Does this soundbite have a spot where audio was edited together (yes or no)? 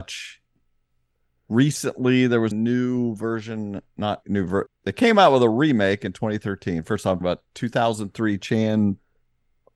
yes